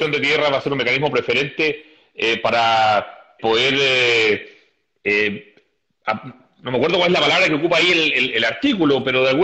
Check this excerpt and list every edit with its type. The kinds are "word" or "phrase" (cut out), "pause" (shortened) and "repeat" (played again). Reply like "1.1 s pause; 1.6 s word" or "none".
3.4 s word

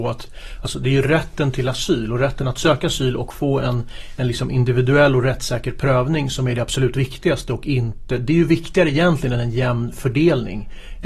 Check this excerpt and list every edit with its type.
none

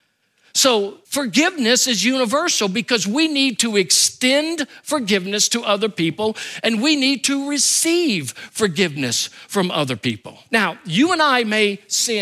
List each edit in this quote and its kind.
1.0 s pause; 10.5 s pause

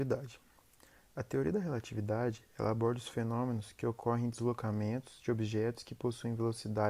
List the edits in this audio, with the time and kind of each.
none

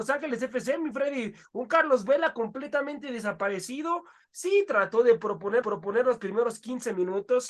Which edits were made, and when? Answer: 5.6 s repeat

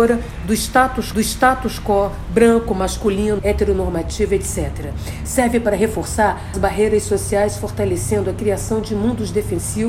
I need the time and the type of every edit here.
1.1 s repeat; 3.4 s word; 6.5 s word

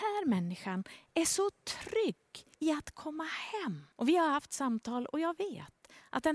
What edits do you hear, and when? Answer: 2.5 s pause; 3.9 s pause

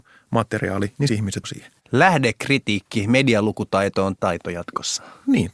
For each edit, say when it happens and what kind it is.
1.1 s word; 1.4 s word; 4.2 s word

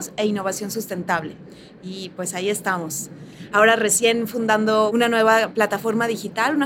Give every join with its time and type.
4.9 s word

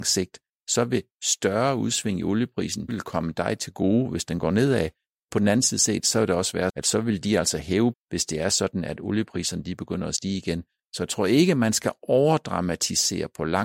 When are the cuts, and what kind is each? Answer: 2.9 s word; 6.7 s word; 7.9 s word

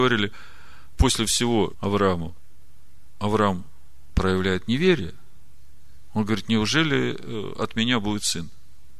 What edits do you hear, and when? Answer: 1.7 s phrase

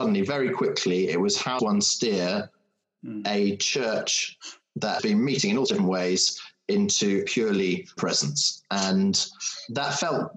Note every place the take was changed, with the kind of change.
1.6 s word; 5.0 s word; 5.7 s word; 7.3 s word; 8.0 s word

